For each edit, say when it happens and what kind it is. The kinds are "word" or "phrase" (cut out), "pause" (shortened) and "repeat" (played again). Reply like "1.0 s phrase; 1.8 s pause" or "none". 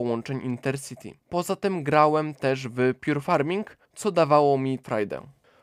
1.2 s pause; 3.8 s pause